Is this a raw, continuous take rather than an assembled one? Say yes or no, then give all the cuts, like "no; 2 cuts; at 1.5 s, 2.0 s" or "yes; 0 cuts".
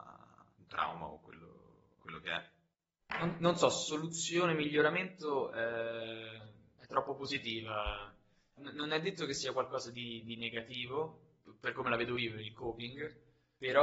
yes; 0 cuts